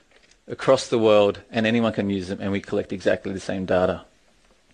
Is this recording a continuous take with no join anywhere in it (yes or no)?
yes